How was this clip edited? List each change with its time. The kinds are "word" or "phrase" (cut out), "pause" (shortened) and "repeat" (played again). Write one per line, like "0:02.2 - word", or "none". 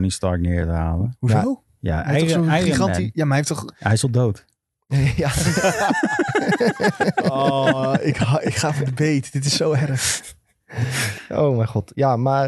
none